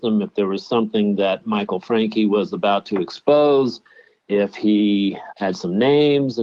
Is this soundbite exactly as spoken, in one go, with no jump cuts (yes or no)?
yes